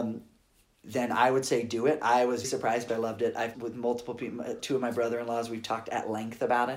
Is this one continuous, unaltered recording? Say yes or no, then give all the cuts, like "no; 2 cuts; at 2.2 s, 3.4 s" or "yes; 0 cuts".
no; 3 cuts; at 2.4 s, 2.9 s, 3.5 s